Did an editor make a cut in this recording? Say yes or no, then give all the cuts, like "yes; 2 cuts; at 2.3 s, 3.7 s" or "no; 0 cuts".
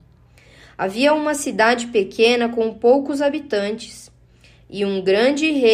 no; 0 cuts